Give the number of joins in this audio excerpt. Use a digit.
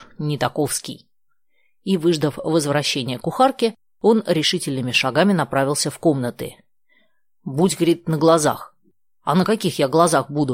0